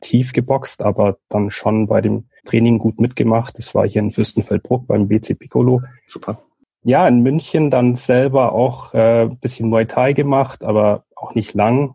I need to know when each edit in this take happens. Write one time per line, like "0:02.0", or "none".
0:02.4
0:06.0